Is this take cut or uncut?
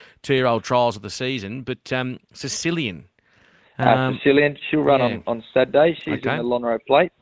uncut